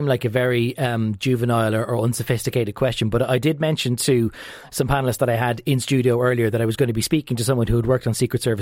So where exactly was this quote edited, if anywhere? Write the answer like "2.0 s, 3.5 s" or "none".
none